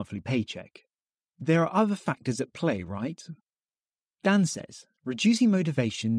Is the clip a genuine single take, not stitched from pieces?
yes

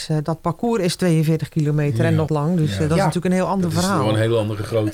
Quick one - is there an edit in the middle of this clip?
yes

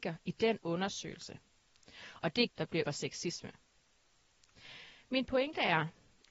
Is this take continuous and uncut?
no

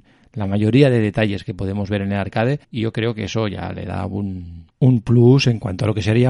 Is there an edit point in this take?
yes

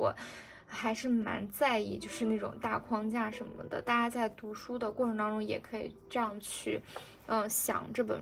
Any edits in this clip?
no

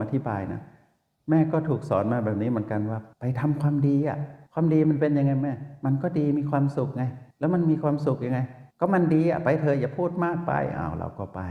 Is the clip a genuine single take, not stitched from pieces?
no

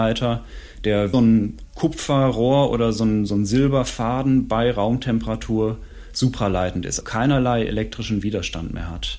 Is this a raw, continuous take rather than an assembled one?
no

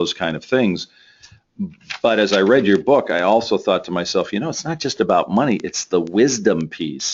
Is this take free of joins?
yes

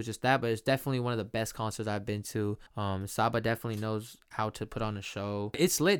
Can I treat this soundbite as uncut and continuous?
no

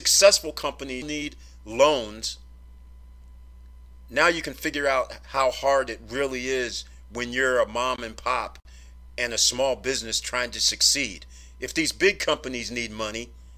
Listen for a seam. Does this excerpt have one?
yes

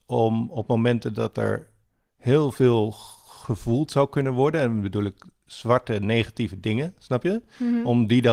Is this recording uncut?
yes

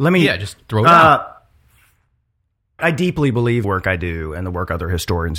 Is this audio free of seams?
no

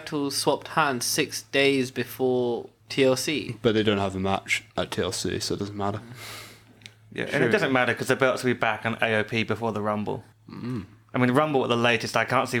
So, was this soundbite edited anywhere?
yes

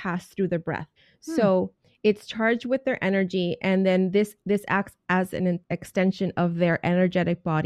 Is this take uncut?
no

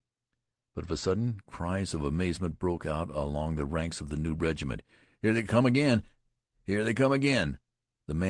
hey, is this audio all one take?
yes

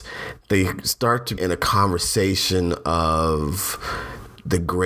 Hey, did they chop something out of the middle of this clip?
yes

